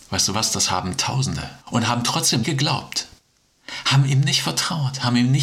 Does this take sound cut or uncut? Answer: cut